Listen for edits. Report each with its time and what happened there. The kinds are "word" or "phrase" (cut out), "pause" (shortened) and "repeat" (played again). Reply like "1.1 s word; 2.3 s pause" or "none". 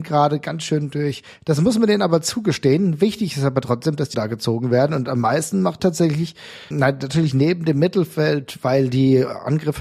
4.1 s phrase; 5.8 s word; 6.7 s word